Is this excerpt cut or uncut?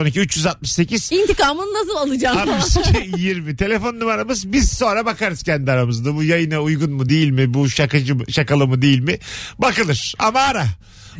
uncut